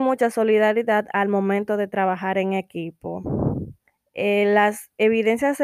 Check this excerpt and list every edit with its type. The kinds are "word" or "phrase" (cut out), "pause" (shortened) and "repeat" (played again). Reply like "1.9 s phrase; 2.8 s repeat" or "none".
3.8 s pause